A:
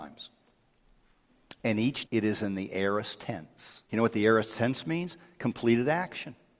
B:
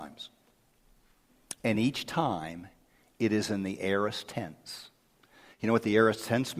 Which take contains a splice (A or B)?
A